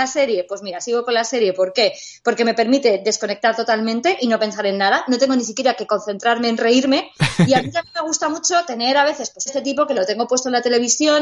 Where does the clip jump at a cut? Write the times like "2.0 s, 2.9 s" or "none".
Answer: 9.5 s